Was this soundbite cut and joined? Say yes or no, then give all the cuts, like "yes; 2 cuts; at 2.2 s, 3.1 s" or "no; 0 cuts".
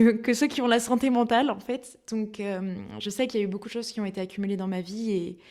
no; 0 cuts